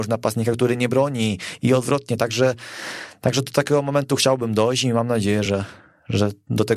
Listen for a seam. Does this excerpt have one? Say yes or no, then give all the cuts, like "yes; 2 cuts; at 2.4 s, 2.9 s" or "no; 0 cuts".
no; 0 cuts